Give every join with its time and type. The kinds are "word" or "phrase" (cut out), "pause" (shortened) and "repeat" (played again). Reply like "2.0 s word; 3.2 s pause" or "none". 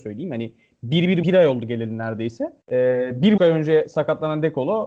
1.2 s word; 2.6 s pause; 3.4 s word

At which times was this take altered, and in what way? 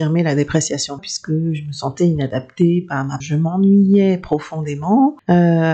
1.0 s phrase; 3.2 s word

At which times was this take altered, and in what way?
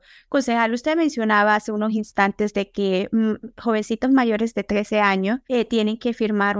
5.4 s pause

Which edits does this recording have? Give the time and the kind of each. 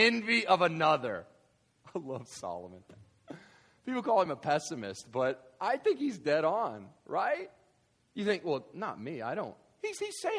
none

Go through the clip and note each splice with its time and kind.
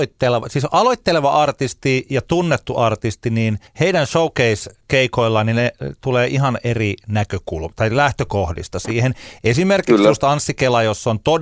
3.7 s pause

